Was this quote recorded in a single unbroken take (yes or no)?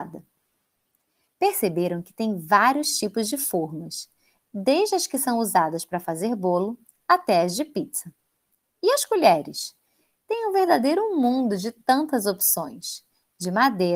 yes